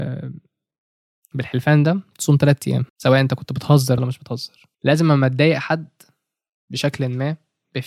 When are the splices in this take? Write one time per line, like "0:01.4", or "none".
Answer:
0:01.3
0:02.9
0:04.0
0:04.7